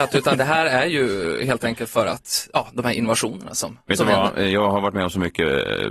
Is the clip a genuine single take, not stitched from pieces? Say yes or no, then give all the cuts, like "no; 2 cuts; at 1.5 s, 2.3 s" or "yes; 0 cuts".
yes; 0 cuts